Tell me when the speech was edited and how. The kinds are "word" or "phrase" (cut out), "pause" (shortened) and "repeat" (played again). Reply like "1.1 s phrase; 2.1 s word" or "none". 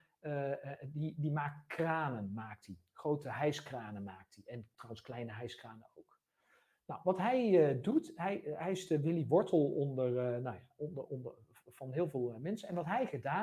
none